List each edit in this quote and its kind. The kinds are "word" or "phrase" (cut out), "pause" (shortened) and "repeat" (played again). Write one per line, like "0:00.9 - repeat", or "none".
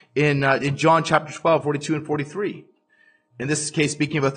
0:02.9 - pause